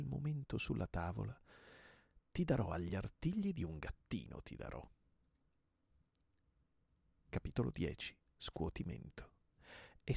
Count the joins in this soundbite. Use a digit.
0